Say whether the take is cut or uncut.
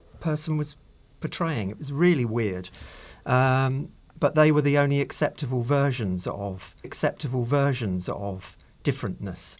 cut